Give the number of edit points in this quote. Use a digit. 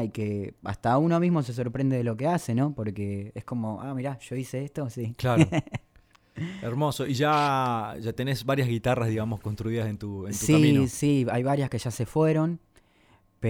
0